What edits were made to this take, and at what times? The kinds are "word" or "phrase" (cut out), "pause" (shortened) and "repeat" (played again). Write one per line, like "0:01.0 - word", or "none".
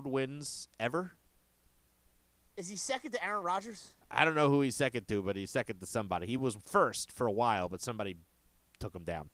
none